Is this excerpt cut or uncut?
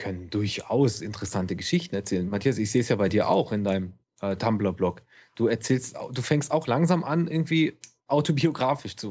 uncut